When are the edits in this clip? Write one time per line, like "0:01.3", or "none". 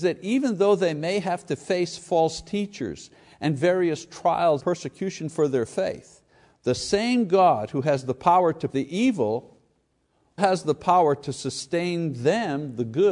0:04.6
0:08.7
0:10.4